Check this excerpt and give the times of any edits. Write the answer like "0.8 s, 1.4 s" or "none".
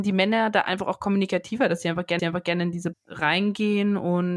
2.2 s, 2.9 s